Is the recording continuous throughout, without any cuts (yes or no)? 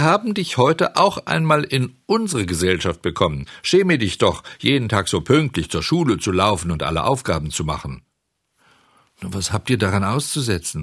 yes